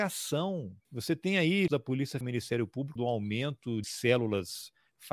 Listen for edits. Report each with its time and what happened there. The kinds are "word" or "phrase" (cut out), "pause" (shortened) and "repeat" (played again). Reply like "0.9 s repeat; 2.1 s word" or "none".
1.7 s word; 2.2 s word; 3.0 s word; 3.8 s word